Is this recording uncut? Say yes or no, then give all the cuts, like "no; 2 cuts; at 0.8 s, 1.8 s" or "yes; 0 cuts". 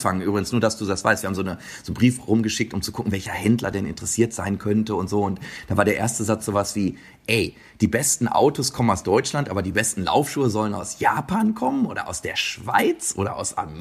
yes; 0 cuts